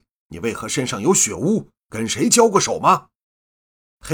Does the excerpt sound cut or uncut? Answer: cut